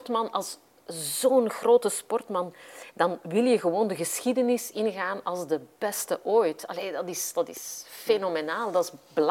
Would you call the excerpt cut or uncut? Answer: uncut